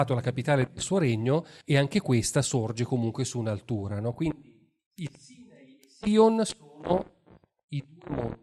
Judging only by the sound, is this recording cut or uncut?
cut